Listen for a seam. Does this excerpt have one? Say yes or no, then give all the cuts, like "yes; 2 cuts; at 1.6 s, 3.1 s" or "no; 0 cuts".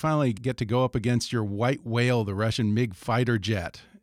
no; 0 cuts